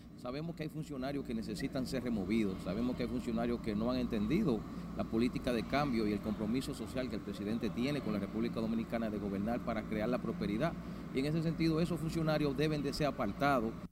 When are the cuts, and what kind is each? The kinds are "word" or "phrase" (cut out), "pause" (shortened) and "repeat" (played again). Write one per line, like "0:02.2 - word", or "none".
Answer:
none